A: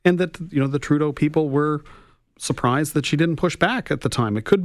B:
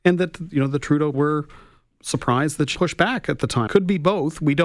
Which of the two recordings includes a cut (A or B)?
B